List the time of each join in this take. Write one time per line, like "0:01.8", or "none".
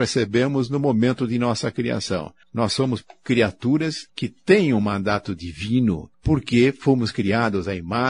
0:02.4
0:04.1
0:06.1